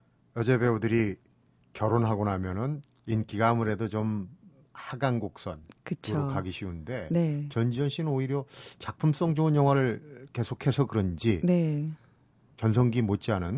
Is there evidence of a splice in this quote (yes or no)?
no